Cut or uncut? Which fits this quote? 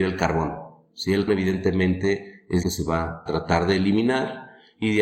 cut